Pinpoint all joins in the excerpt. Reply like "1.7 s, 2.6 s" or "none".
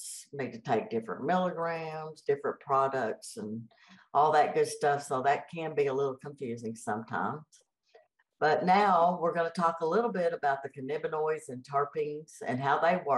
none